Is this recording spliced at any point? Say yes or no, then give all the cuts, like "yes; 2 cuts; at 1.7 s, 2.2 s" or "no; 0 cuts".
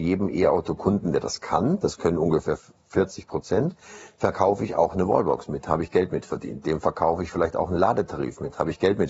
no; 0 cuts